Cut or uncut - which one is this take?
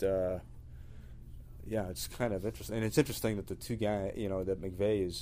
uncut